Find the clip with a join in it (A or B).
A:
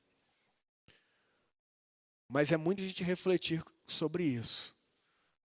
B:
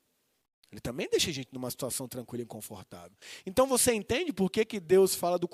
A